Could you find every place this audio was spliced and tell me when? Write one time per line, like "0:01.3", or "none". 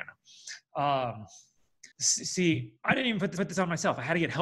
0:01.9
0:03.4